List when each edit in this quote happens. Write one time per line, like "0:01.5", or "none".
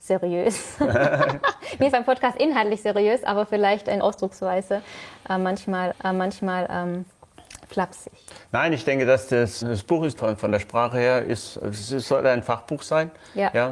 0:01.9
0:04.0
0:05.9
0:09.6
0:10.2